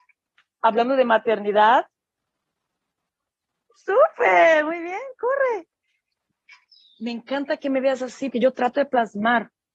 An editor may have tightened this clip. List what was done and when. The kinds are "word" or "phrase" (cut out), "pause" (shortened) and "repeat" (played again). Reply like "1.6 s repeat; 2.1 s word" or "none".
8.3 s phrase